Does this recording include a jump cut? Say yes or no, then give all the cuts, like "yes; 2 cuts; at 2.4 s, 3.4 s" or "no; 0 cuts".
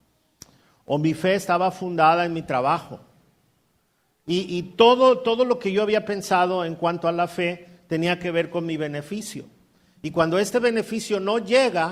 no; 0 cuts